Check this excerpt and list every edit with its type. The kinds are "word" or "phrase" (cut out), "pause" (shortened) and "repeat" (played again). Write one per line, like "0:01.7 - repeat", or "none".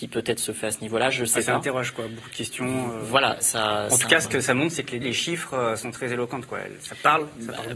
0:05.0 - word

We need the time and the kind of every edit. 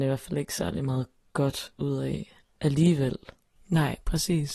none

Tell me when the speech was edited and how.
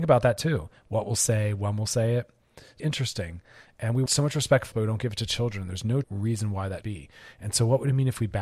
0:02.8 - word
0:04.1 - word
0:04.7 - word
0:06.0 - word
0:06.8 - word

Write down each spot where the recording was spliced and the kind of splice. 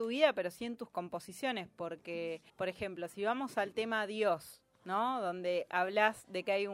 0:02.5 - pause

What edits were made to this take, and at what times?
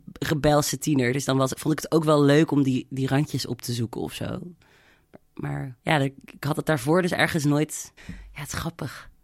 0:05.8 - pause
0:08.0 - pause

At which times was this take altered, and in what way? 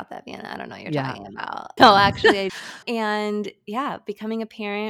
0:01.8 - word
0:02.5 - word
0:02.8 - word

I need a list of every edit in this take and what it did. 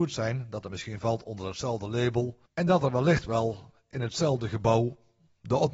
0:02.5 - pause

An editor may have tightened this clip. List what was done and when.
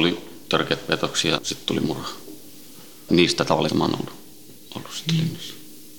0:01.4 - word
0:03.1 - word
0:03.7 - word

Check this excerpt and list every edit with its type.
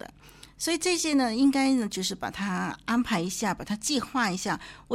none

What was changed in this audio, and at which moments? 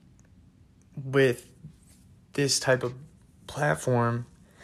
none

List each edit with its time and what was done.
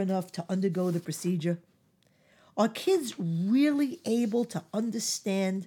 none

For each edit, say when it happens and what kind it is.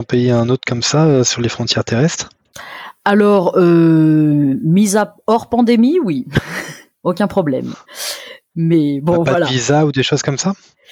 none

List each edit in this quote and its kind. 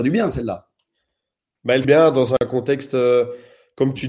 0:01.8 - phrase

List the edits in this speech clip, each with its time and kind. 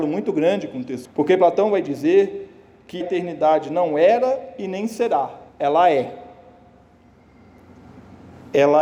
0:01.0 - word
0:03.0 - word
0:05.5 - pause

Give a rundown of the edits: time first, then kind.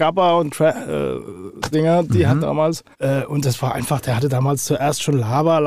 0:01.7 - word
0:02.4 - phrase
0:02.9 - pause

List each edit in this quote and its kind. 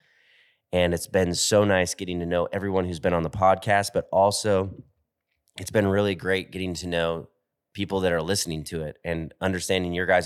none

